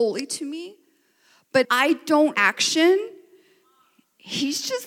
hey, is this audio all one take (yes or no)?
no